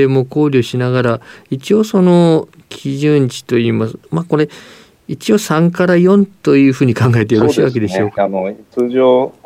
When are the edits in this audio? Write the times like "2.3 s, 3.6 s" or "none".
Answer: none

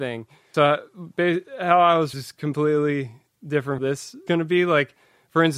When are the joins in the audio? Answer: 2.1 s, 3.8 s, 4.3 s

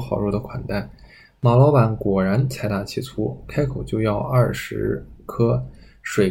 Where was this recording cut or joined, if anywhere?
none

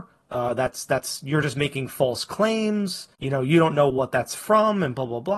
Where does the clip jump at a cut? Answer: 3.1 s

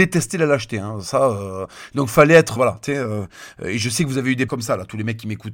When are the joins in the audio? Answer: 2.6 s, 4.5 s

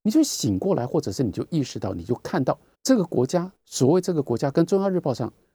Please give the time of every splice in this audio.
2.7 s, 3.6 s

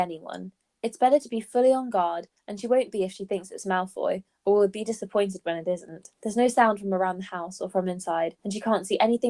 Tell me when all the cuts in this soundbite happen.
6.1 s, 8.4 s

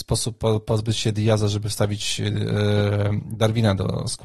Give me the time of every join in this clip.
none

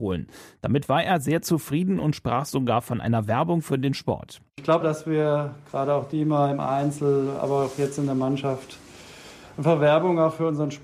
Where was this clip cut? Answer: 4.8 s

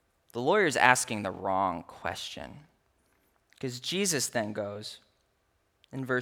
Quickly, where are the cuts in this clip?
none

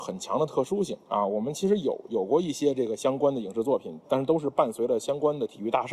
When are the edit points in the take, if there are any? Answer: 1.0 s

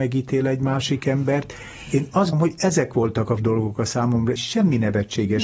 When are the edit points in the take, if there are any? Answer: 2.3 s, 3.4 s, 4.4 s

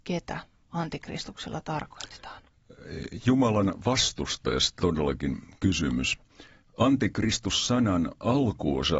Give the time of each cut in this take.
4.8 s

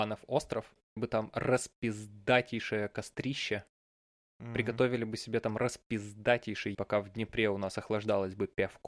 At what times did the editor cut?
1.0 s, 6.7 s

